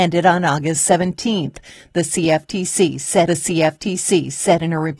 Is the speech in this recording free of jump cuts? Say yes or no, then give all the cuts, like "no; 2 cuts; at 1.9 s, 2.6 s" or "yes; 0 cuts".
no; 1 cut; at 3.3 s